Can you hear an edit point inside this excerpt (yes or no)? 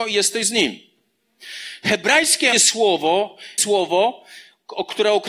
yes